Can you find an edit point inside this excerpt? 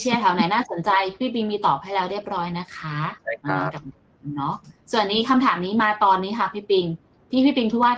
yes; 1 cut; at 3.2 s

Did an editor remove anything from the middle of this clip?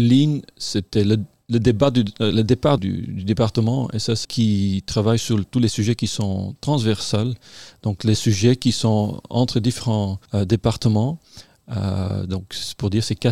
yes; 3 cuts; at 2.8 s, 4.2 s, 10.2 s

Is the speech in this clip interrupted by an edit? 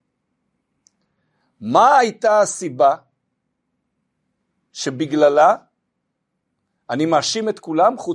no; 0 cuts

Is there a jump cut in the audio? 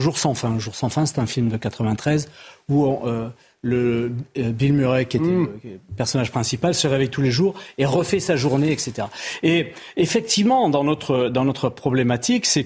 no; 0 cuts

